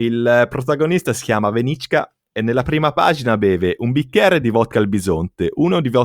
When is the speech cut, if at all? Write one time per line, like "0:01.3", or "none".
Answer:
none